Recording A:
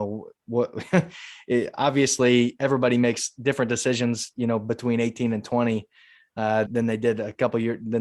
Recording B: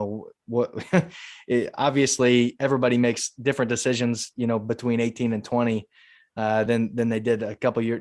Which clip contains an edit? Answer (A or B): A